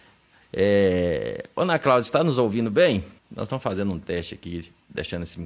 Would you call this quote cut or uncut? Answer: cut